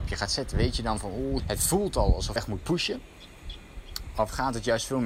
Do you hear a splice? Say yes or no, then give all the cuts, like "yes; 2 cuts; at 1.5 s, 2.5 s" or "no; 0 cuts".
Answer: yes; 2 cuts; at 1.4 s, 2.4 s